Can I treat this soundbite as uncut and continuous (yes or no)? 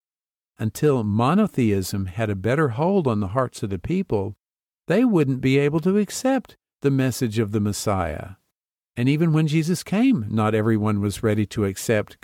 yes